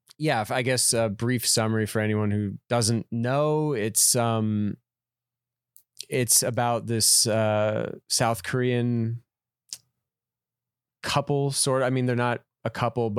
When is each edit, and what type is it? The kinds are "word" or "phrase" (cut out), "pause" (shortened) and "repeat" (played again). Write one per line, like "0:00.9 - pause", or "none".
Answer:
0:02.6 - pause
0:08.0 - pause